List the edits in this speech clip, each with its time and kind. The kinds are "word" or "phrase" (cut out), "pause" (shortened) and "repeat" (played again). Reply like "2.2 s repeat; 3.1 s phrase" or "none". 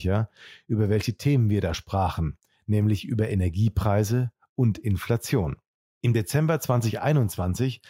none